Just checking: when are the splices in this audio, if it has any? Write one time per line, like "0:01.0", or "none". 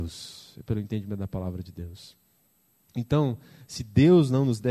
none

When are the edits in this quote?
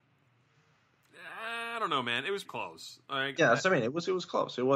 0:02.4
0:03.4

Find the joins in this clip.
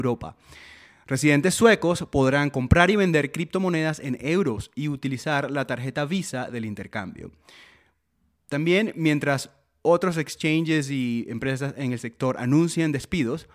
none

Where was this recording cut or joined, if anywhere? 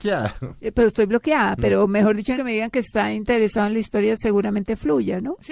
0:02.4

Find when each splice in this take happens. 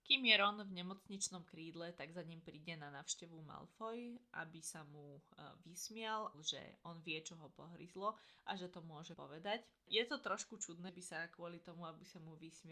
0:06.3
0:09.1
0:10.9

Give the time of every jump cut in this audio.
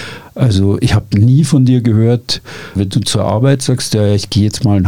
0:02.7

